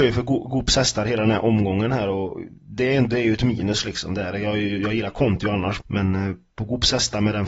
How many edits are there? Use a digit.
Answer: 1